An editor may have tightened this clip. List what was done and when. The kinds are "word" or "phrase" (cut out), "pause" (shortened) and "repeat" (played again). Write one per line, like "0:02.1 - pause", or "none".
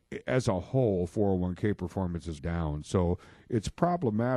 0:02.4 - word